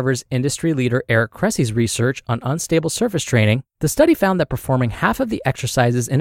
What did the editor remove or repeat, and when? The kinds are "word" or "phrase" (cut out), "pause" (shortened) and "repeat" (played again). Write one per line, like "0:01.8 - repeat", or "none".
0:03.7 - pause

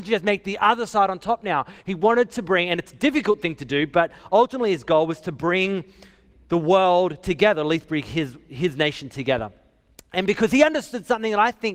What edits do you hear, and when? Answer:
none

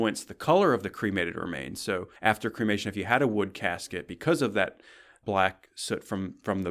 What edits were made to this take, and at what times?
0:02.2 - pause

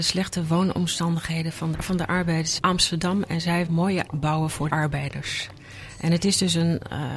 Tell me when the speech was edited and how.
0:01.7 - word
0:02.6 - word
0:03.7 - word
0:04.1 - word
0:04.7 - word

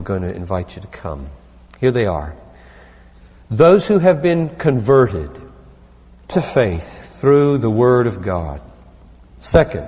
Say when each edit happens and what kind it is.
0:06.3 - phrase

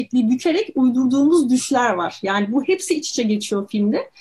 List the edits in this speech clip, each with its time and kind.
none

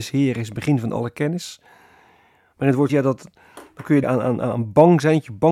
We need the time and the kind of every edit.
0:02.9 - word
0:04.0 - word

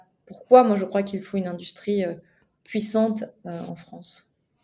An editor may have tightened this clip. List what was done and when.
none

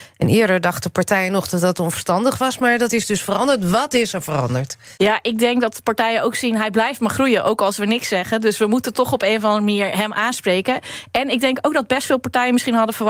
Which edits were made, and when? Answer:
0:04.9 - pause

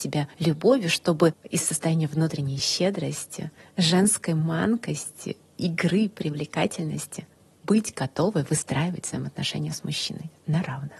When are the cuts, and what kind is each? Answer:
none

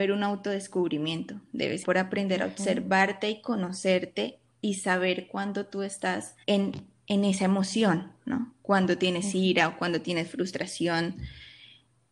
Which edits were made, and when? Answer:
0:01.8 - word
0:06.4 - pause

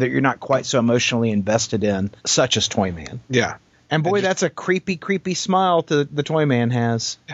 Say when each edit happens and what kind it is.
0:02.2 - pause
0:03.2 - pause

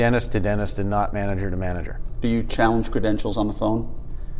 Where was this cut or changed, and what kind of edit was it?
none

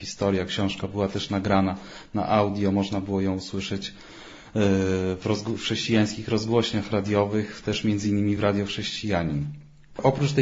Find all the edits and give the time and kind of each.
none

